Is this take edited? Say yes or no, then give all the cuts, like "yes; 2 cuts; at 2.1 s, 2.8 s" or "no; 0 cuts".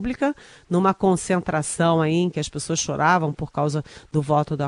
no; 0 cuts